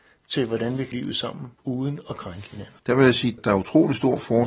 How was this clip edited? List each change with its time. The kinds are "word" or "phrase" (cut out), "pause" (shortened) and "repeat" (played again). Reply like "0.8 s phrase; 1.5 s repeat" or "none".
0.9 s word; 1.5 s pause; 2.8 s pause; 3.4 s word